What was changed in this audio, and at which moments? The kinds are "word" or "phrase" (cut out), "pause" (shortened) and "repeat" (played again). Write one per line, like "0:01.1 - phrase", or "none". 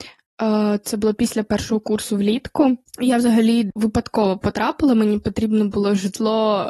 0:03.8 - word